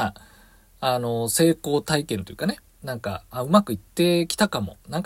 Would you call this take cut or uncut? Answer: cut